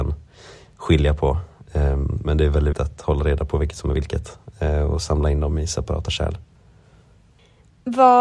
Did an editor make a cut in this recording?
yes; 1 cut; at 2.7 s

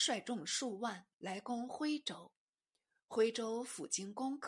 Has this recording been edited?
yes; 1 cut; at 1.1 s

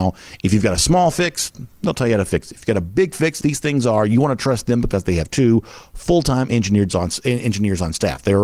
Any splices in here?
yes; 1 cut; at 3.4 s

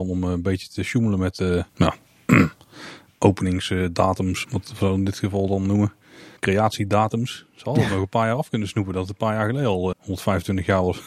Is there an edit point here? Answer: yes; 4 cuts; at 1.7 s, 4.4 s, 6.4 s, 9.9 s

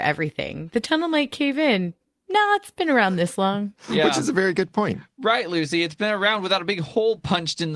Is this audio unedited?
yes; 0 cuts

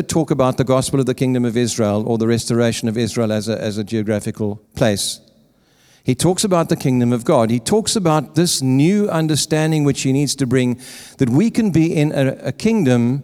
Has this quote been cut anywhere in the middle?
yes; 1 cut; at 4.7 s

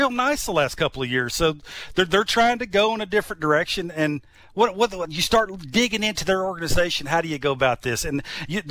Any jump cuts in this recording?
no; 0 cuts

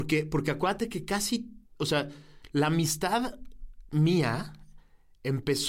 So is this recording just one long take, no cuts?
no; 1 cut; at 1.6 s

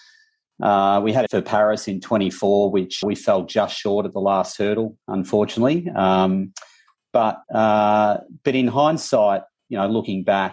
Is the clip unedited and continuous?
no; 3 cuts; at 1.3 s, 3.0 s, 7.4 s

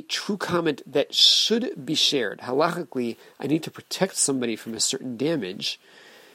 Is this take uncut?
yes; 0 cuts

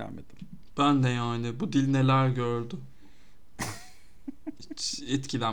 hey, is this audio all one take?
yes; 0 cuts

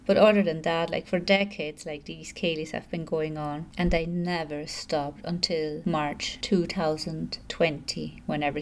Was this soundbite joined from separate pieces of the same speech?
no; 0 cuts

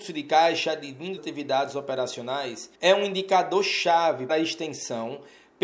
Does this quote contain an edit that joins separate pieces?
yes; 3 cuts; at 1.2 s, 2.8 s, 4.3 s

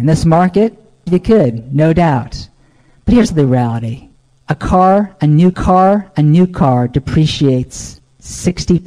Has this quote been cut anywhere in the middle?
yes; 4 cuts; at 1.1 s, 3.3 s, 4.3 s, 5.5 s

